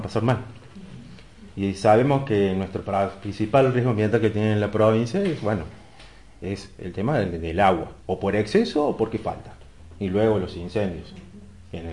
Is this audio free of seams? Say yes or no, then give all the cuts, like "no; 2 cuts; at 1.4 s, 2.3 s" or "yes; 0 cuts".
no; 3 cuts; at 1.5 s, 8.0 s, 9.8 s